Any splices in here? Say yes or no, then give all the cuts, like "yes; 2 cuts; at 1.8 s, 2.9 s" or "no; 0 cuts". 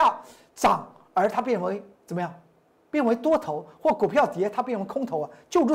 no; 0 cuts